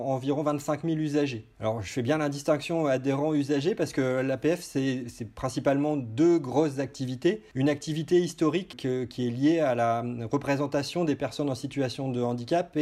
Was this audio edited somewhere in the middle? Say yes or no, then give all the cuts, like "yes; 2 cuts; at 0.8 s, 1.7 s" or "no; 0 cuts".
yes; 1 cut; at 8.7 s